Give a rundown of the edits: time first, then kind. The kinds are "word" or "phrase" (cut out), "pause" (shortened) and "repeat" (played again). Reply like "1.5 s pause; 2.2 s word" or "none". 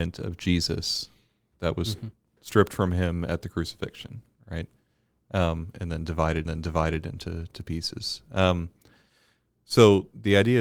6.5 s repeat